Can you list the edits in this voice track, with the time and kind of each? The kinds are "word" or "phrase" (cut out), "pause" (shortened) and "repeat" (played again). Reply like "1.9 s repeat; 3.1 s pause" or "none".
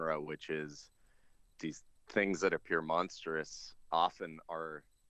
none